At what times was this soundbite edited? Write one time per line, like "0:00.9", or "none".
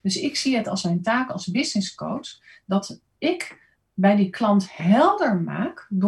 none